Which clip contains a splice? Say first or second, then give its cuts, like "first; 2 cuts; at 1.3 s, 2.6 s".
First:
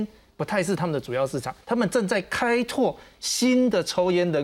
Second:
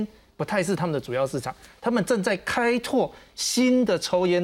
first; 1 cut; at 1.6 s